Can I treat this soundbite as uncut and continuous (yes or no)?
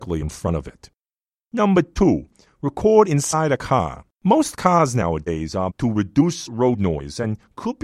no